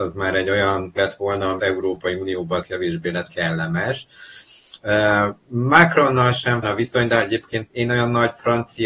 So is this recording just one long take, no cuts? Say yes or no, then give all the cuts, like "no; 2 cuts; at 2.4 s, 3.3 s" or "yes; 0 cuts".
no; 6 cuts; at 1.0 s, 1.6 s, 2.6 s, 3.3 s, 6.6 s, 7.7 s